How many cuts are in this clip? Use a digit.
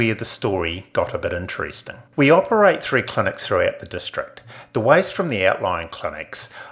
1